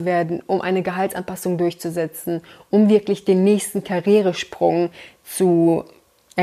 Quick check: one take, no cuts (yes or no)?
yes